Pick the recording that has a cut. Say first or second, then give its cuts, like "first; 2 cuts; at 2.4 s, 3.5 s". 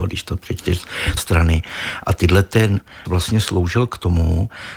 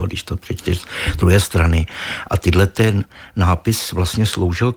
first; 2 cuts; at 1.2 s, 3.0 s